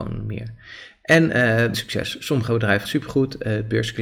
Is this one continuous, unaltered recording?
no; 2 cuts; at 1.7 s, 2.8 s

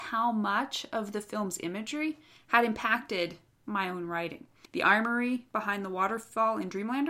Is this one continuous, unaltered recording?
yes; 0 cuts

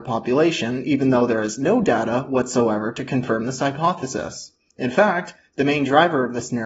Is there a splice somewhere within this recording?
no; 0 cuts

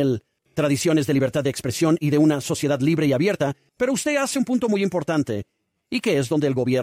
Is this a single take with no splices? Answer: yes; 0 cuts

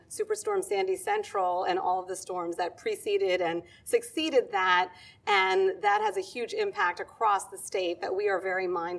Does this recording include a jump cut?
no; 0 cuts

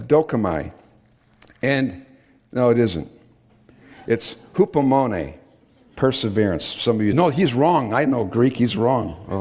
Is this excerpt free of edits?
no; 1 cut; at 7.1 s

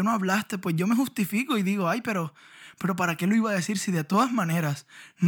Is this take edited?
no; 0 cuts

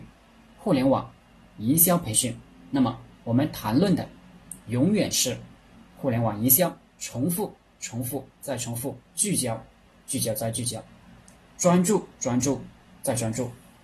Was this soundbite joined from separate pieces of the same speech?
yes; 4 cuts; at 3.1 s, 6.9 s, 9.1 s, 12.1 s

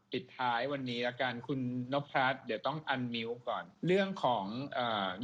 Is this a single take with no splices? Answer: no; 1 cut; at 3.7 s

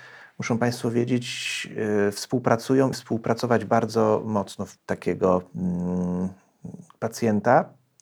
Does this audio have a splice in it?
yes; 2 cuts; at 2.9 s, 4.8 s

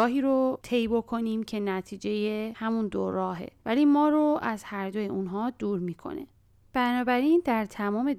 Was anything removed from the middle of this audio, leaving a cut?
no; 0 cuts

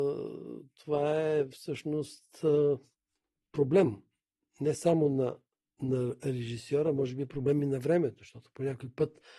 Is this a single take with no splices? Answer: yes; 0 cuts

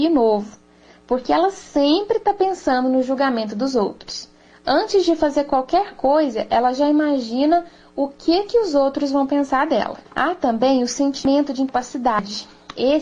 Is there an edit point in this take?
yes; 1 cut; at 10.0 s

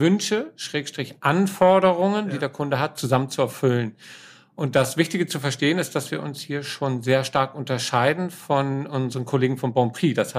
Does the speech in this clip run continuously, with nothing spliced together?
yes; 0 cuts

